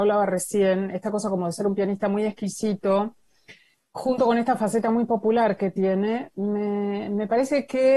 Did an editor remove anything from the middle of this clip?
no; 0 cuts

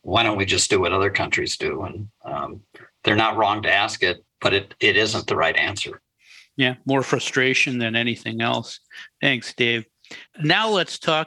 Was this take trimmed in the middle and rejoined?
no; 0 cuts

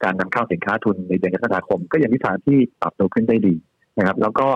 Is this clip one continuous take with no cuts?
no; 1 cut; at 2.7 s

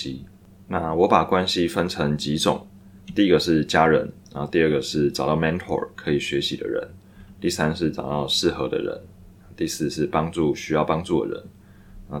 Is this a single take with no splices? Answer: no; 1 cut; at 4.3 s

